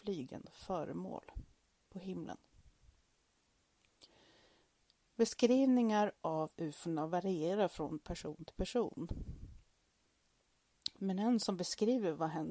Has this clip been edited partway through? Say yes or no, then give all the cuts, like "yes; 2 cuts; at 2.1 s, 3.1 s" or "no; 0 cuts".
no; 0 cuts